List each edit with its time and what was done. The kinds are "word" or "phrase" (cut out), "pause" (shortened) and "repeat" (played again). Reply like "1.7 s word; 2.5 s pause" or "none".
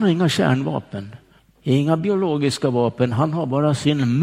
1.4 s pause